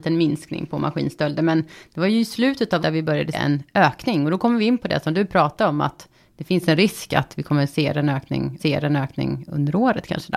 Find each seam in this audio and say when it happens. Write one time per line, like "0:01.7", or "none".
0:02.8
0:03.3
0:08.6